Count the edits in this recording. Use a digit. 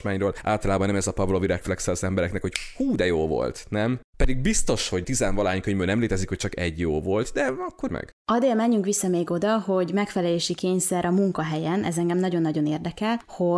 1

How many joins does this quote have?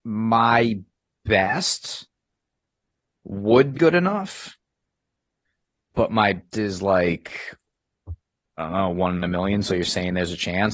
3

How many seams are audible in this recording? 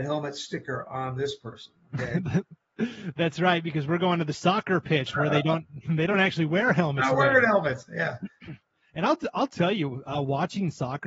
0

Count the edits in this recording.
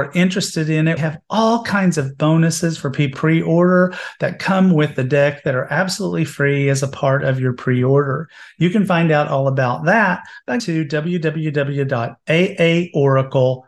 3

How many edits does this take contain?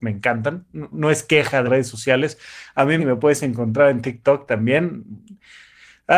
3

